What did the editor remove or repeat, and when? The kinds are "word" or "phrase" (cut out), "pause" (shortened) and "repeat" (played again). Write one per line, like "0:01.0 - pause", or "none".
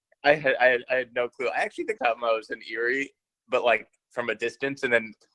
0:02.0 - phrase